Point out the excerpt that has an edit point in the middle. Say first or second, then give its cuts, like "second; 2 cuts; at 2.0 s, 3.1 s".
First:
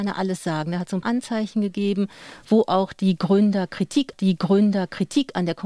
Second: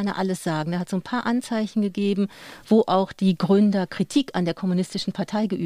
first; 2 cuts; at 1.0 s, 4.1 s